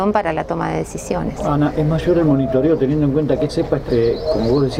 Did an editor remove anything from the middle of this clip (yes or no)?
yes